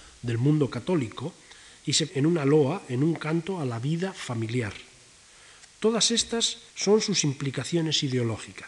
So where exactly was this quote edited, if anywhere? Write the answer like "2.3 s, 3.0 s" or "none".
2.1 s, 6.7 s

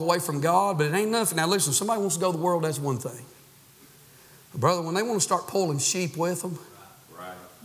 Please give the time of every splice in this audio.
none

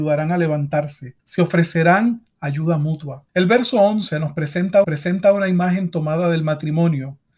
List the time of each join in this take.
1.2 s, 3.3 s, 4.8 s

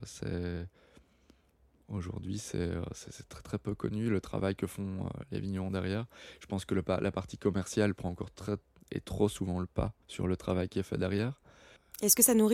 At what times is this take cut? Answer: 10.0 s

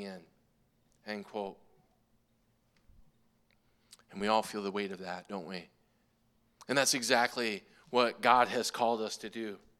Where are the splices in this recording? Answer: none

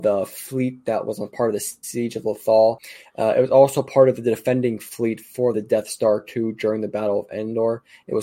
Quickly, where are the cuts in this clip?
none

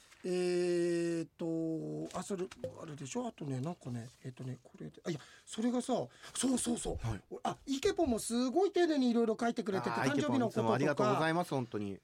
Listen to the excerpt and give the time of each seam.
4.1 s

